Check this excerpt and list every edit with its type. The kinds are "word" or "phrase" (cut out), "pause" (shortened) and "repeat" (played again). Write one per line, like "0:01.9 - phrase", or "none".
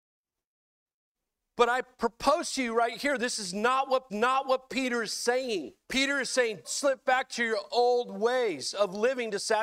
0:04.1 - repeat
0:05.8 - pause
0:06.6 - word